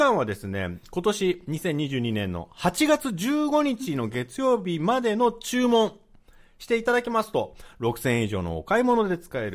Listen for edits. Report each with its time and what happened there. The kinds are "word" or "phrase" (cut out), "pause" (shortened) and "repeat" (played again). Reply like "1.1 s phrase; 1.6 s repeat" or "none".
none